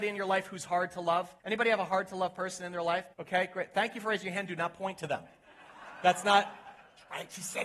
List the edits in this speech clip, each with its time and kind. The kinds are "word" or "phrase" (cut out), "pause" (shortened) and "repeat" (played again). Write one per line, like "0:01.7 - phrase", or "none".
0:01.4 - pause
0:03.1 - pause